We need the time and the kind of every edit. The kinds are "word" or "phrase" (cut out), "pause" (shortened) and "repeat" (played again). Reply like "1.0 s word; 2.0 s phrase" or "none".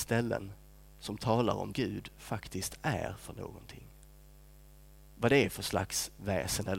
1.7 s word